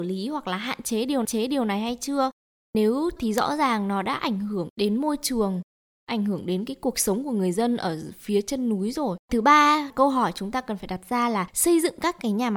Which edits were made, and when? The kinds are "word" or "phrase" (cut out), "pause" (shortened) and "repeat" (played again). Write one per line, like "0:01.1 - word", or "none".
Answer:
0:01.2 - repeat
0:03.2 - word
0:09.2 - pause